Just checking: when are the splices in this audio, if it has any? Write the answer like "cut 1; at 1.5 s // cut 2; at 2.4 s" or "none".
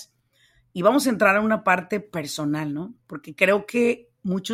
cut 1; at 3.0 s